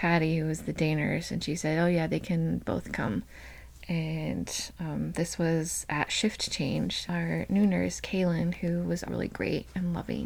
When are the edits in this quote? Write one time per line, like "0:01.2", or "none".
0:07.1
0:09.0